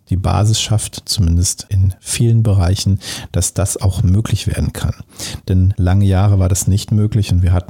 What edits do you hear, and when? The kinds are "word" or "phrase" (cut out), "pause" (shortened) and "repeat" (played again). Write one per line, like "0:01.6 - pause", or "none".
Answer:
none